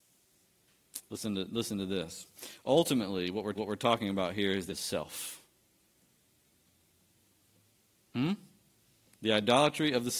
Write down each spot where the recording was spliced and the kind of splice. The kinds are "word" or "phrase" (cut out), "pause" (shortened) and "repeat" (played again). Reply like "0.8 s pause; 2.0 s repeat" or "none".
3.5 s repeat; 4.7 s phrase

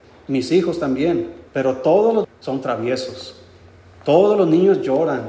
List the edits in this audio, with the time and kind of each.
1.5 s pause; 2.2 s word

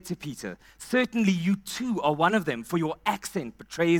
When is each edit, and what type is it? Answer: none

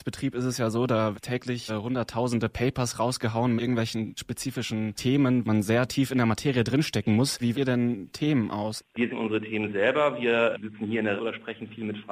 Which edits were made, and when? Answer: 1.1 s word; 1.7 s word; 3.6 s word; 4.2 s word; 5.4 s word; 7.5 s word; 9.1 s word; 10.5 s word; 11.2 s word

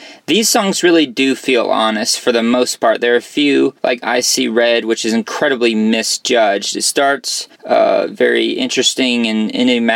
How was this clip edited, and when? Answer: 3.8 s pause; 7.5 s pause

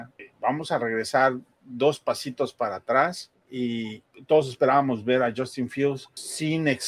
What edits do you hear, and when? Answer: none

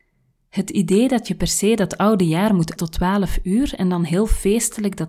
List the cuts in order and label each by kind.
2.8 s word

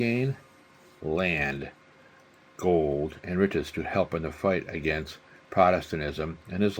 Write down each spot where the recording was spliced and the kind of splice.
none

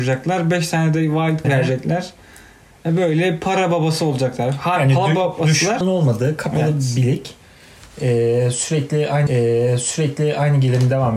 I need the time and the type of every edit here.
1.4 s word; 5.8 s phrase; 9.3 s repeat

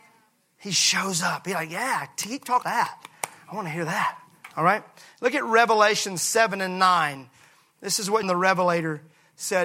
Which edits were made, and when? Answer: 2.6 s word; 4.5 s pause; 8.2 s word

